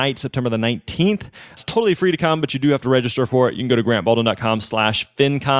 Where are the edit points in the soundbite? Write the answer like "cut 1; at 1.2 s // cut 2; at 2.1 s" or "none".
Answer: none